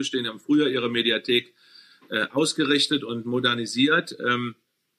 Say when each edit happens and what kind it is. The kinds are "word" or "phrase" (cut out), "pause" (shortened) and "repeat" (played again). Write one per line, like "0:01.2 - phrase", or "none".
none